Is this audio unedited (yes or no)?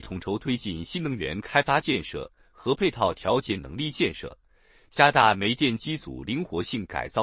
yes